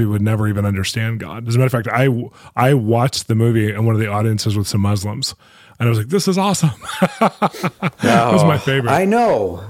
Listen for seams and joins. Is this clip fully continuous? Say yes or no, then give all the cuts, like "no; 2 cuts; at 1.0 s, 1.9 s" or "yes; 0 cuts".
yes; 0 cuts